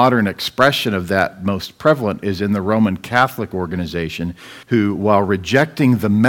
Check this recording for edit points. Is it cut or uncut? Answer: cut